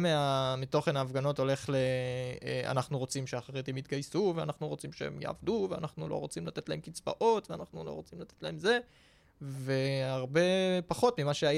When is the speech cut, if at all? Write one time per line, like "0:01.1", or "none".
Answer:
none